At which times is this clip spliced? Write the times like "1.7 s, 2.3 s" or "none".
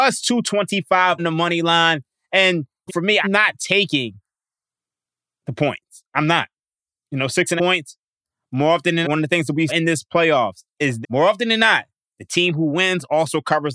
1.2 s, 2.9 s, 3.2 s, 7.6 s, 9.0 s, 9.7 s, 11.0 s